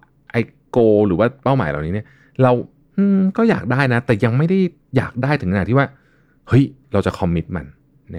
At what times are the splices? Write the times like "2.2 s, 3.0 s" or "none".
none